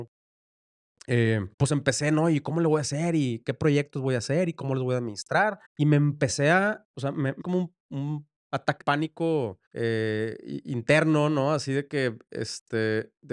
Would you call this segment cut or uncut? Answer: cut